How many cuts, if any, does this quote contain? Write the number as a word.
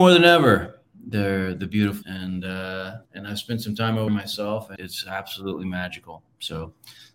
four